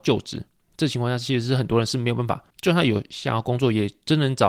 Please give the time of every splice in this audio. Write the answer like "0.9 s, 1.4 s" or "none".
2.5 s